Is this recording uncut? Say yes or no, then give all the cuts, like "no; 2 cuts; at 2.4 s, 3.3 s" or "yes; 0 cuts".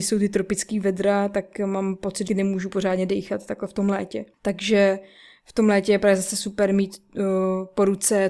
no; 2 cuts; at 2.3 s, 4.3 s